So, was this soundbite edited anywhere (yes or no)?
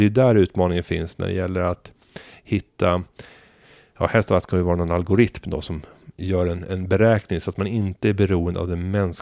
no